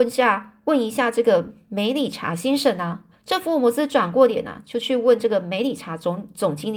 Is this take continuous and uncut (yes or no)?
no